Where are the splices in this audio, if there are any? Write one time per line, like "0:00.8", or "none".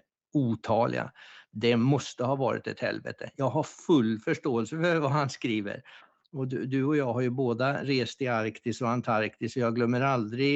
none